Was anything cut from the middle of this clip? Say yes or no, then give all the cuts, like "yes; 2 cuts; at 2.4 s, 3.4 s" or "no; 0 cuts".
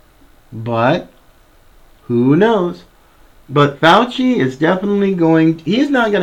no; 0 cuts